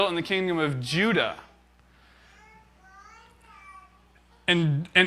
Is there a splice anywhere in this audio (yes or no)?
no